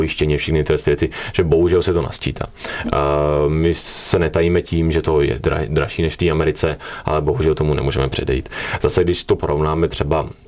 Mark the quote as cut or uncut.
uncut